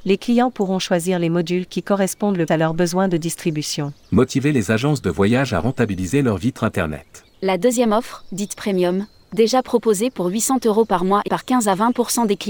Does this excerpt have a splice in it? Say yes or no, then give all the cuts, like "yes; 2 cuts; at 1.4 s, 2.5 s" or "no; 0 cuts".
yes; 4 cuts; at 2.5 s, 4.0 s, 7.3 s, 11.3 s